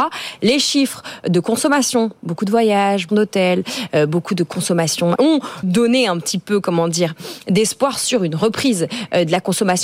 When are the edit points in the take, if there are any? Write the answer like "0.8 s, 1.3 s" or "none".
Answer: 3.1 s, 5.2 s, 5.6 s